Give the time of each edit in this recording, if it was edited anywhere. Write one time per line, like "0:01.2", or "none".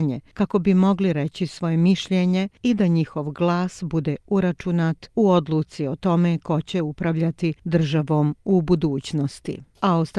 none

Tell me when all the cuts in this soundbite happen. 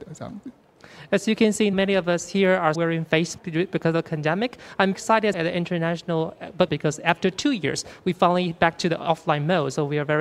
0:01.7
0:02.7
0:03.4
0:04.9
0:05.3
0:06.7

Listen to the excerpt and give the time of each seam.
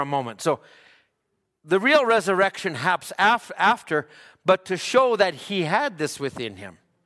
none

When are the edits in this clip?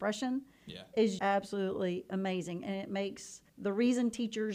0:01.2
0:03.5

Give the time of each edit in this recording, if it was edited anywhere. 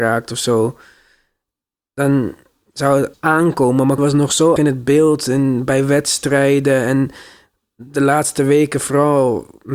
0:03.1
0:04.0
0:04.6

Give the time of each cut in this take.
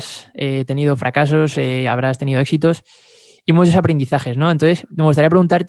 none

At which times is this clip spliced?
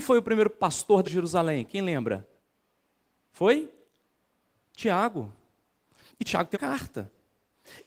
0:01.0
0:06.5

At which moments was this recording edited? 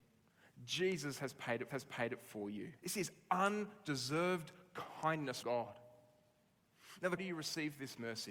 0:01.7
0:02.8
0:05.4
0:07.2

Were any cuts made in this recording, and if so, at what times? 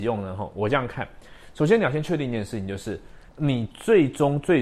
0:03.3

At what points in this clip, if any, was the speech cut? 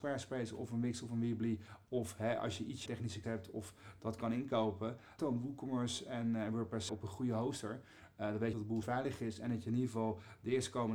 0:02.9
0:03.2
0:05.2
0:06.9
0:08.5
0:08.8

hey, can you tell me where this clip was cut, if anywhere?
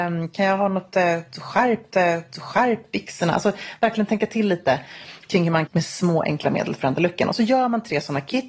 0:01.9
0:05.7

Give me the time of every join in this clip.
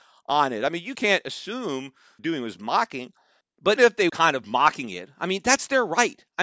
0:00.9
0:02.2
0:03.8
0:04.1

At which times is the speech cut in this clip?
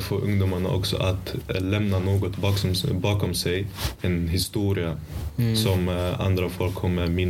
none

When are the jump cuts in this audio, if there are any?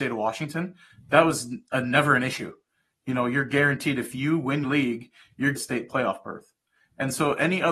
0:04.6
0:05.5

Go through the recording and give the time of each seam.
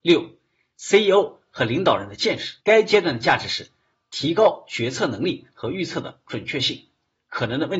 0:02.6

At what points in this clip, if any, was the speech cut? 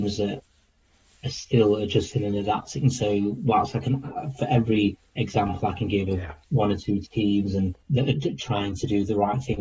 0:06.4
0:07.8
0:08.1

